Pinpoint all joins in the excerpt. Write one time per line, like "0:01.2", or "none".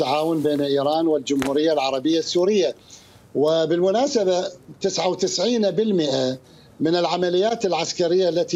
none